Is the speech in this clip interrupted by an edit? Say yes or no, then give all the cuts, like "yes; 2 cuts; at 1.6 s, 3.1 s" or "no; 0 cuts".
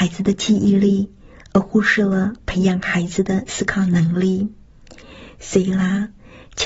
no; 0 cuts